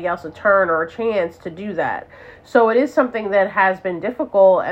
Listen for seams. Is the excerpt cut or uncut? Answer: uncut